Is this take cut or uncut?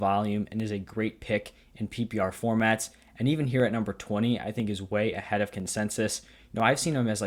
uncut